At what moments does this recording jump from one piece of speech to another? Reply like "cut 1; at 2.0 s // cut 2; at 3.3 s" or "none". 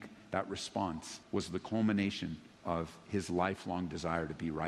cut 1; at 1.2 s // cut 2; at 2.5 s